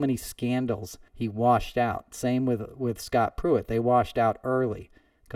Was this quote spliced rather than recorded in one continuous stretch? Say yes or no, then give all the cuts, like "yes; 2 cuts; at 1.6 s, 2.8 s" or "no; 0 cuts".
yes; 1 cut; at 1.1 s